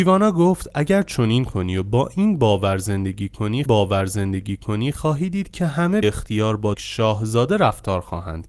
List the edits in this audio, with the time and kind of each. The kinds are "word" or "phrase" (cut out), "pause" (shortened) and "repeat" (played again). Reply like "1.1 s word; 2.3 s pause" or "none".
3.7 s repeat; 6.0 s word; 6.7 s phrase